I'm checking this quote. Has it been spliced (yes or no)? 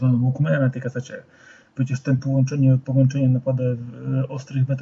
no